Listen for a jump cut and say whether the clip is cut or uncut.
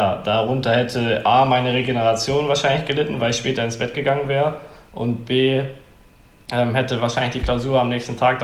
uncut